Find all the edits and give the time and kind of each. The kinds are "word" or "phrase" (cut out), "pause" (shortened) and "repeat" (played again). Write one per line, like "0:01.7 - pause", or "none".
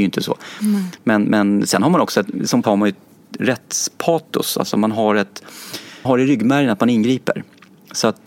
0:02.6 - word
0:06.0 - word